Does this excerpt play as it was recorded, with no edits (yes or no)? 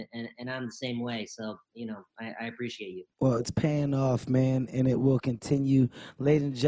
no